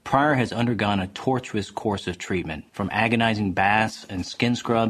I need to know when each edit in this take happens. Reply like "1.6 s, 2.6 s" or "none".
2.7 s